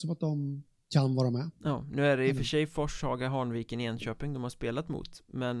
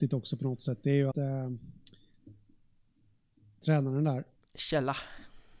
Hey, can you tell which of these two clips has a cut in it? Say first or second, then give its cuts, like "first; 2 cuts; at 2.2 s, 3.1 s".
second; 2 cuts; at 1.1 s, 4.4 s